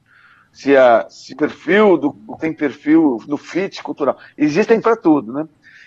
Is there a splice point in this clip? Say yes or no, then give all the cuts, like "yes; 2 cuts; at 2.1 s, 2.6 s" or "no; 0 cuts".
yes; 3 cuts; at 1.3 s, 2.4 s, 4.8 s